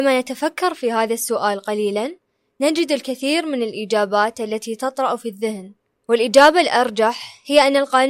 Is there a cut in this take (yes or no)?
no